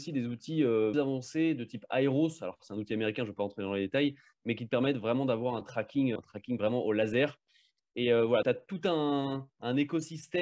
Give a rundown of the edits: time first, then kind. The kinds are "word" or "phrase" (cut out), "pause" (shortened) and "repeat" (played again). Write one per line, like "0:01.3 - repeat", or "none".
0:00.9 - phrase
0:06.2 - word
0:08.4 - word